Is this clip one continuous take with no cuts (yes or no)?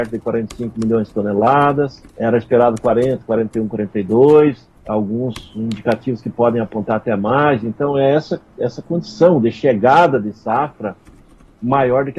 no